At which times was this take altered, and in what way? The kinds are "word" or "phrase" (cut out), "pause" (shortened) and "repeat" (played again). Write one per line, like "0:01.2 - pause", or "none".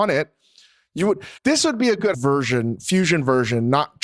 0:01.4 - pause
0:02.1 - word